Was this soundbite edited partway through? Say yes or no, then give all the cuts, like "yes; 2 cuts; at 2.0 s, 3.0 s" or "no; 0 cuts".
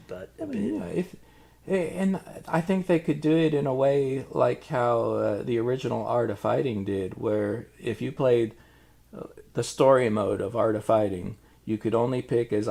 no; 0 cuts